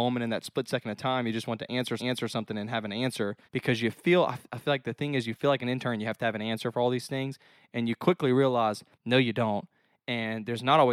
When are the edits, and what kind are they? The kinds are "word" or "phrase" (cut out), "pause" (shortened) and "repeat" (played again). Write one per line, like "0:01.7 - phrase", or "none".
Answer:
0:02.0 - repeat
0:03.4 - pause
0:08.9 - pause